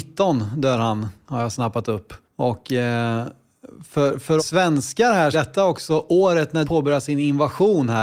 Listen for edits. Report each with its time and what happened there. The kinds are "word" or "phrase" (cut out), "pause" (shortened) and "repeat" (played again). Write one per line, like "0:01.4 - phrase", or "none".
0:02.2 - pause
0:04.4 - word
0:05.3 - phrase
0:06.6 - word

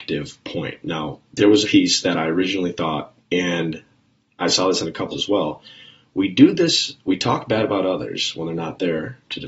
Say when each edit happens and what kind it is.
0:01.6 - word
0:03.2 - word
0:05.1 - word

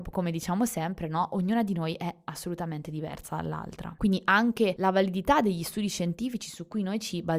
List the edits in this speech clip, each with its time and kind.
none

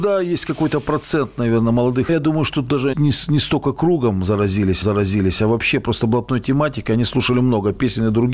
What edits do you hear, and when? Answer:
0:02.1 - phrase
0:02.9 - word
0:04.8 - repeat

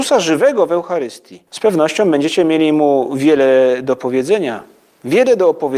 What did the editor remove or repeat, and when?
0:01.5 - pause

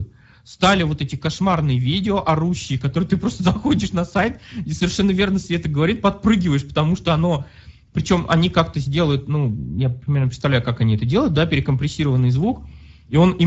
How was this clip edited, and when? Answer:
none

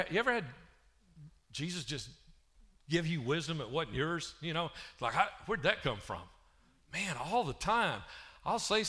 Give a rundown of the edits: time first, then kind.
none

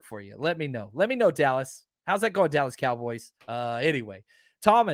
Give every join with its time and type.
0:03.4 - pause

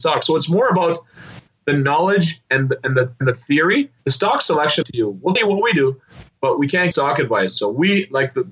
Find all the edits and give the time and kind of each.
0:01.5 - word
0:04.0 - pause
0:04.8 - phrase
0:05.4 - word
0:06.9 - word

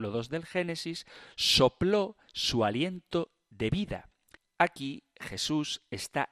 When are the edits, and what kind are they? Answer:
none

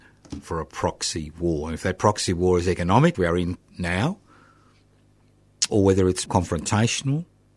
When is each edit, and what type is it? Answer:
0:03.1 - word
0:05.7 - word
0:06.3 - word

